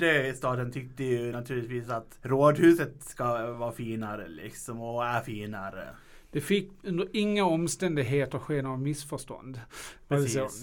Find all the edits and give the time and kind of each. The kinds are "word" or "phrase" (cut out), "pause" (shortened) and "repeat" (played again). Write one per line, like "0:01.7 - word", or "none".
none